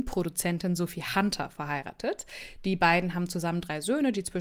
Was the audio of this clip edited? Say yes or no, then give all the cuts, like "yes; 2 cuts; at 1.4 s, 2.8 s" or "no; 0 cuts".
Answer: no; 0 cuts